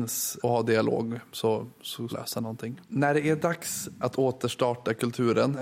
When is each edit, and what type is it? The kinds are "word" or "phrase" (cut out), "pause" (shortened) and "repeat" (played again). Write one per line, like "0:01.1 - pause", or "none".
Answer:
0:02.1 - phrase
0:02.8 - pause